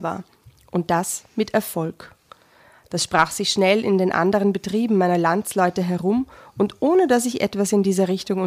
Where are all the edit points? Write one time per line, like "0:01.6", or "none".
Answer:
none